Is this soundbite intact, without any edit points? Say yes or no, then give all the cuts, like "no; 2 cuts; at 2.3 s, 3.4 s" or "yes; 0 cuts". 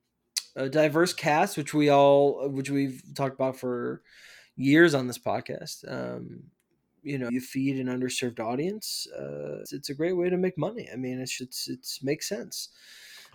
no; 3 cuts; at 7.3 s, 9.7 s, 11.4 s